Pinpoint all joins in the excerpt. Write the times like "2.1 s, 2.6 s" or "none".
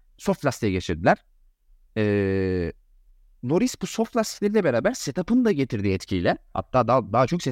none